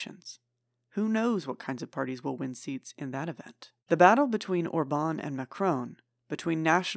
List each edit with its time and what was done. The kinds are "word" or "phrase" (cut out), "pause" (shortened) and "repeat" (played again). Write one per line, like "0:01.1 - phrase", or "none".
0:03.8 - pause